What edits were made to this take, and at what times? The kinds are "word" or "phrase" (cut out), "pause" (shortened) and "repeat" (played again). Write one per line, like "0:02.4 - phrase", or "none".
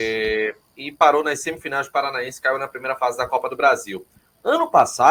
none